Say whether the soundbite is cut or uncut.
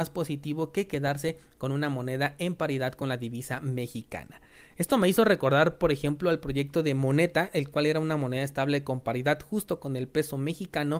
uncut